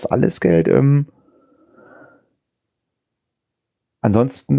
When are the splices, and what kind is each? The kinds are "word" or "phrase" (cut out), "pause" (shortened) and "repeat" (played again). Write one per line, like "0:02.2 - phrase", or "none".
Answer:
none